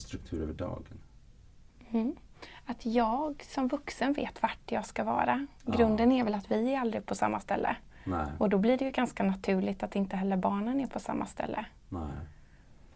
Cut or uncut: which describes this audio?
uncut